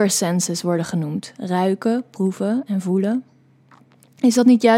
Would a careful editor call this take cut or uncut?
uncut